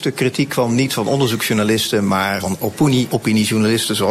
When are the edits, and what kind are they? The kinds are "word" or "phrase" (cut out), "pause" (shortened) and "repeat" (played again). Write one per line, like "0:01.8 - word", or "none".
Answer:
0:02.4 - word
0:03.1 - word